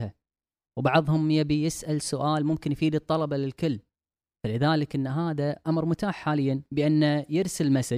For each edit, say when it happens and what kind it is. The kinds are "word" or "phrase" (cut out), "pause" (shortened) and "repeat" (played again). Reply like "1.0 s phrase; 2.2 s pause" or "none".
none

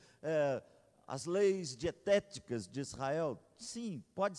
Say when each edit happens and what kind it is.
none

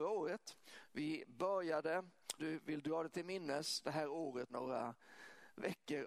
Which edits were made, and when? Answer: 2.4 s word; 4.5 s word

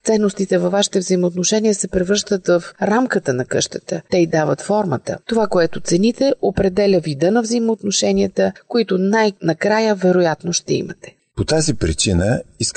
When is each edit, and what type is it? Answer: 4.1 s pause; 5.2 s pause

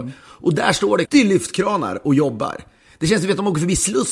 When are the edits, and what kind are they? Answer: 1.0 s word

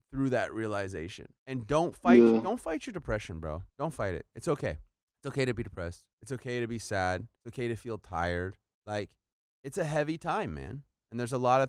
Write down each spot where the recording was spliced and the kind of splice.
1.4 s pause; 3.7 s pause; 5.0 s pause; 6.1 s pause; 7.4 s pause; 8.7 s pause

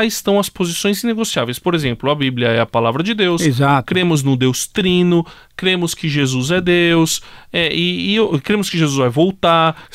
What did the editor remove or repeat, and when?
none

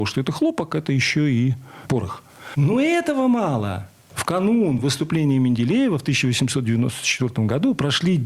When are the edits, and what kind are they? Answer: none

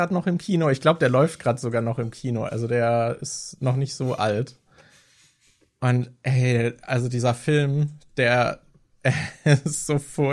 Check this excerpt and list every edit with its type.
none

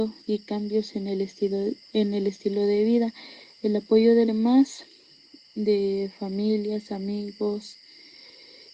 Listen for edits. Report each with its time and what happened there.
4.3 s word

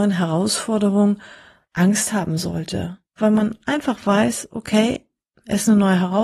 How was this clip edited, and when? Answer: none

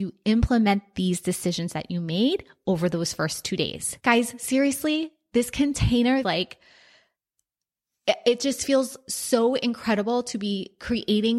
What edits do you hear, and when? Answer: 4.0 s pause; 6.2 s phrase

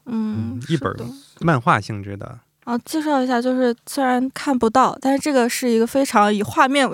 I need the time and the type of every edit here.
3.8 s pause

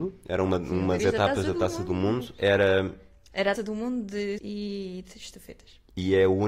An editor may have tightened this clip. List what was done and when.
1.0 s word; 3.6 s word; 4.4 s word

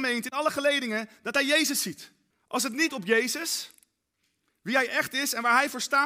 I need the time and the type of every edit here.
2.3 s pause; 2.9 s word

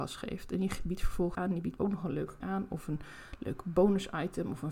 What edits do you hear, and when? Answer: 1.3 s word; 1.8 s word; 2.4 s word

